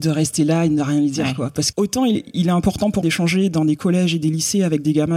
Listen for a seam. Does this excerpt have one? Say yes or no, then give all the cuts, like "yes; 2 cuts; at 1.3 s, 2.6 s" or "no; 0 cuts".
yes; 3 cuts; at 1.7 s, 2.1 s, 3.0 s